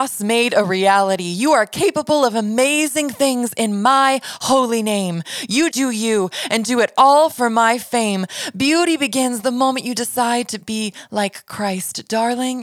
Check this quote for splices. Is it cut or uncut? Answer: cut